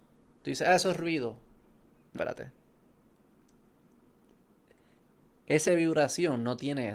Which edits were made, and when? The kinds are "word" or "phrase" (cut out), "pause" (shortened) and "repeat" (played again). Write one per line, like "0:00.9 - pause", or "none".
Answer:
0:02.1 - word
0:05.7 - word